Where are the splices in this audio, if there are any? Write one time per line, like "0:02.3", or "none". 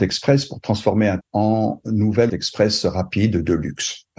0:01.2
0:02.3

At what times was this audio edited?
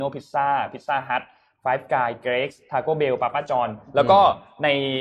none

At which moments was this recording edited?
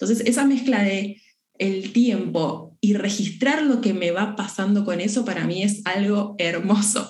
none

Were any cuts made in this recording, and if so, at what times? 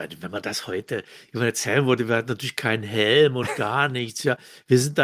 none

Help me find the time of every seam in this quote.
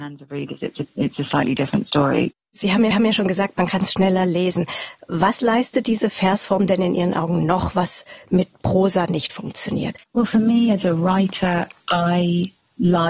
0:02.9
0:10.1

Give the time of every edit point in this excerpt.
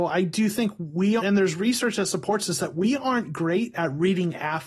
0:01.2

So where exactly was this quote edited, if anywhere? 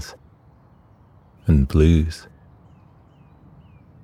0:01.4

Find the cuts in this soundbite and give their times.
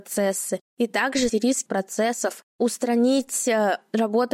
0:01.3
0:01.7

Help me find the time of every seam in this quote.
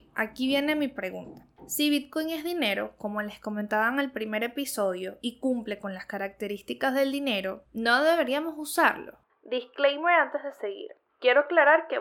none

